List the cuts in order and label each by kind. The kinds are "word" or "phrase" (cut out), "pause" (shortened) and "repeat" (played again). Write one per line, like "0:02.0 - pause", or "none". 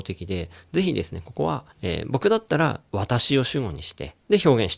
0:01.7 - pause